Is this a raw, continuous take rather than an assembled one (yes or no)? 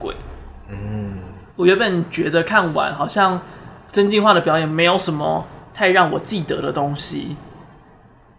no